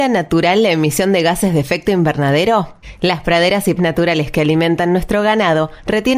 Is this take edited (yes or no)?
yes